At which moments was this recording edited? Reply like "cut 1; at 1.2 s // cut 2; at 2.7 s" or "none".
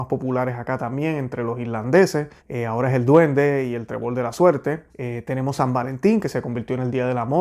cut 1; at 2.4 s // cut 2; at 4.9 s